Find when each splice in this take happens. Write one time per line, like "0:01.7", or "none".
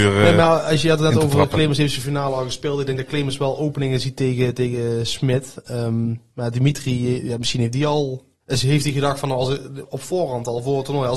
0:08.4